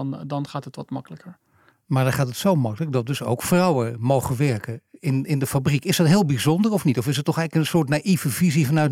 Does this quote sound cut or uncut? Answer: uncut